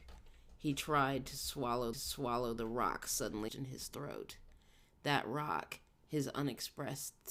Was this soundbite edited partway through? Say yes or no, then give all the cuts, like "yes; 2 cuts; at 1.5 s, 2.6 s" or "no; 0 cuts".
yes; 2 cuts; at 1.9 s, 3.5 s